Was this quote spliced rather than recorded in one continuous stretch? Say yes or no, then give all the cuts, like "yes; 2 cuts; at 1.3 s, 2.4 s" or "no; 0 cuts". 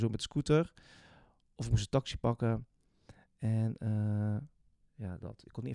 no; 0 cuts